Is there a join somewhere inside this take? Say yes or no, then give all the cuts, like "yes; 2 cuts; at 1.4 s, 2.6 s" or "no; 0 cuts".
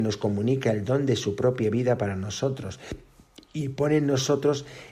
no; 0 cuts